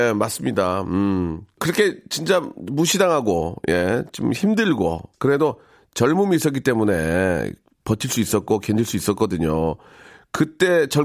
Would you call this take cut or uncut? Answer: uncut